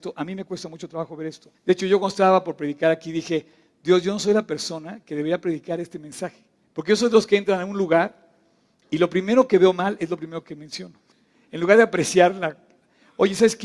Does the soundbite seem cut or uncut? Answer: cut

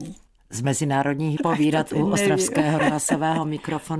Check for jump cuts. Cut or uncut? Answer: cut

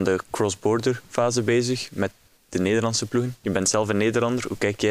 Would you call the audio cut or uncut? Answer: uncut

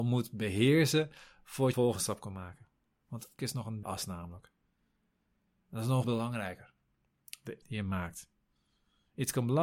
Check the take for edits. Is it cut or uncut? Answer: cut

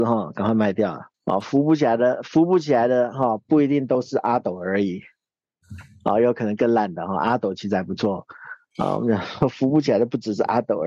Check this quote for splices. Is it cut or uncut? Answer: cut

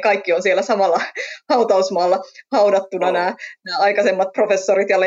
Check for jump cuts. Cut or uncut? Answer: uncut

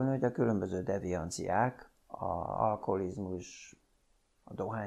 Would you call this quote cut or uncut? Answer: cut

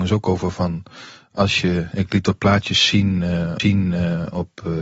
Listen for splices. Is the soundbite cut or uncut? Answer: cut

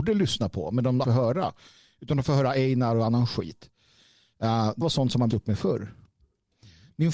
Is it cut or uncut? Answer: cut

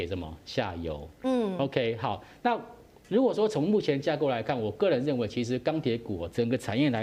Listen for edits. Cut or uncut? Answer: uncut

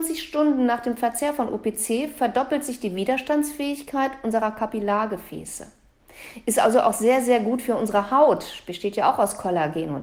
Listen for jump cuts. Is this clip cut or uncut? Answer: uncut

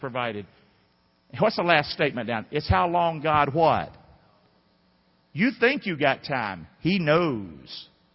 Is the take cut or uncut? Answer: uncut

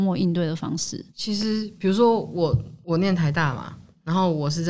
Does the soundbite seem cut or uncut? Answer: cut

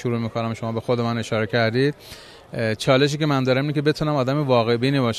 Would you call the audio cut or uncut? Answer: uncut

